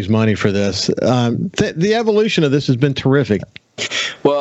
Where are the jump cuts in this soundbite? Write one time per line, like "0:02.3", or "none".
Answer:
0:03.4